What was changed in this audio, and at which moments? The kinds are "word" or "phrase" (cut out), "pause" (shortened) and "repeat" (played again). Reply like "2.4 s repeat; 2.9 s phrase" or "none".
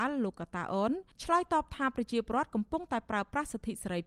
1.1 s pause

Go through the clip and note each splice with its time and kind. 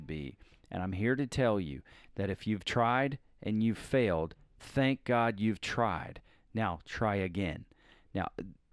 none

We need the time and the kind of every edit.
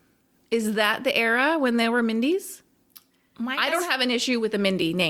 none

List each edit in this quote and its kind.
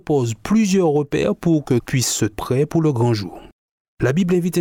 1.8 s word; 2.3 s word

